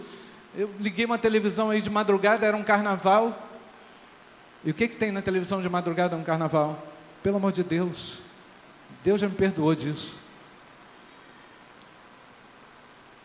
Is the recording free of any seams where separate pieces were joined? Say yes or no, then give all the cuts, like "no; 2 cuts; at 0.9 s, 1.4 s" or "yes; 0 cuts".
yes; 0 cuts